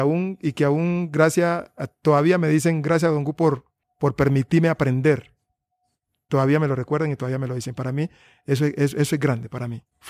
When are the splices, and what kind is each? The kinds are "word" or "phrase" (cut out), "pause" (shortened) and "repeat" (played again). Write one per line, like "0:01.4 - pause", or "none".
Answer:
0:03.8 - pause